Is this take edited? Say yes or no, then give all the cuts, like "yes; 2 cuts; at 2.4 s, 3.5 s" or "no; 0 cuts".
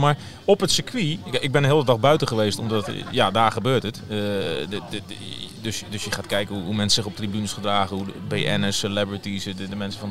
no; 0 cuts